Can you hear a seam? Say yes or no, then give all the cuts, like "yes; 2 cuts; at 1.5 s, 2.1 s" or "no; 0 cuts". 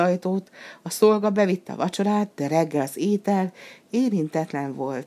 no; 0 cuts